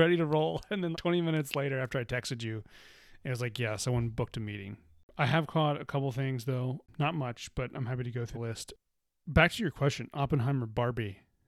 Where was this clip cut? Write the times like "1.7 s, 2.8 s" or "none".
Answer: 0.9 s, 8.3 s